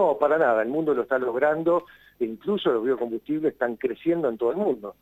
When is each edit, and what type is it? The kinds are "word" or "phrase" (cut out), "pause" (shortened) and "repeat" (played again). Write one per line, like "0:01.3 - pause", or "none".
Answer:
none